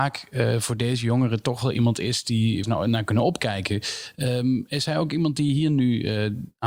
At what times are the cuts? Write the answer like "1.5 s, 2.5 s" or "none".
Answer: 2.6 s